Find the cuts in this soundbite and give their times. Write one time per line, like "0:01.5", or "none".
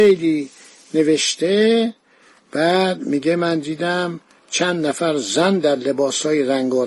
none

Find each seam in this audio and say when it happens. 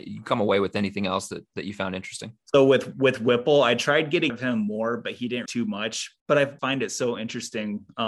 0:04.3
0:05.5
0:06.2
0:06.6

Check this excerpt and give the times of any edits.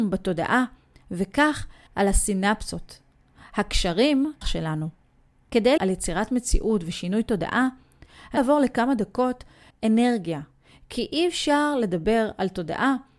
0:01.9
0:04.4
0:05.8
0:08.4
0:09.7

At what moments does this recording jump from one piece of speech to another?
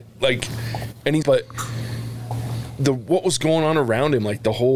0:01.2

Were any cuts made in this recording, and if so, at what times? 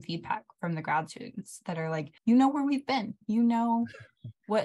0:02.2

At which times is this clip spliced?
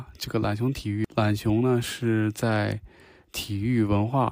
none

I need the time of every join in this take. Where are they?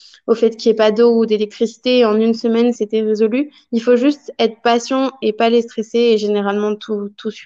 0:02.8

